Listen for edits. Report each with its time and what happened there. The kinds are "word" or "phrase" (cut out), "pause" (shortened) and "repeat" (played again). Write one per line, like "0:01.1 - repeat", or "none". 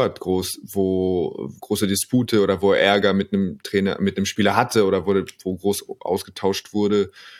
0:01.6 - pause